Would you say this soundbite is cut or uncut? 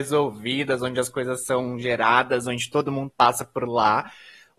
uncut